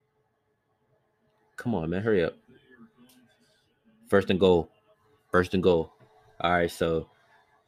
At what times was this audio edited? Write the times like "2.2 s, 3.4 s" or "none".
none